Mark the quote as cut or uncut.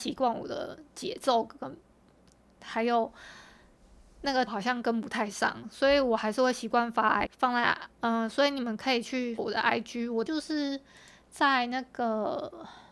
cut